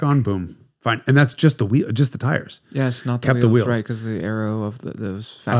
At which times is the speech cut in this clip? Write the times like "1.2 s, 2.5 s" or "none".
none